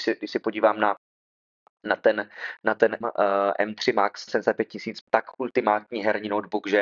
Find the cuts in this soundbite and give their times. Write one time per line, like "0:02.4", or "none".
0:03.0
0:04.3
0:05.0